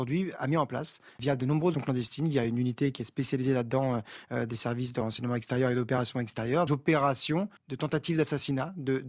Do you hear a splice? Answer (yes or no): yes